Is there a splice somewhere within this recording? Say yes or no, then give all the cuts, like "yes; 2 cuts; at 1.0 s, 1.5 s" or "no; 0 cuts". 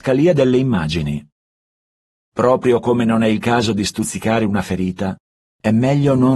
no; 0 cuts